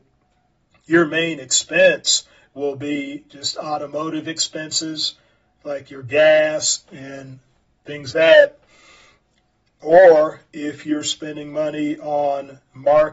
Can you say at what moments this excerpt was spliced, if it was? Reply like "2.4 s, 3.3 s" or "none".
8.1 s